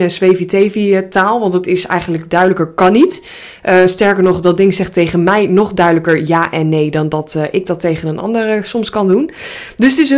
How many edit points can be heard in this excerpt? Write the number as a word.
zero